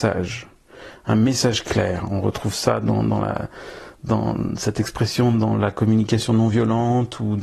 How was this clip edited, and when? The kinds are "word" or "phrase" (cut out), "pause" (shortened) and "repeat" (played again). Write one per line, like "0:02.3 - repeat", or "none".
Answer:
none